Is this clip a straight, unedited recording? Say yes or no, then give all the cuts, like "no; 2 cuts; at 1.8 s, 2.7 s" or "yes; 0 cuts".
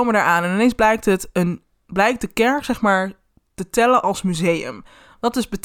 yes; 0 cuts